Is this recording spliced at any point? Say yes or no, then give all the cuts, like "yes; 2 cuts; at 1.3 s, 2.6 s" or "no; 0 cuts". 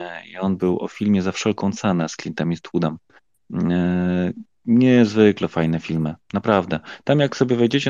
no; 0 cuts